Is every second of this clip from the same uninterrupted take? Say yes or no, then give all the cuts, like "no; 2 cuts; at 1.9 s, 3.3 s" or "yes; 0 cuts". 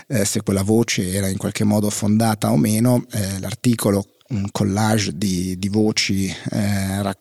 no; 1 cut; at 4.2 s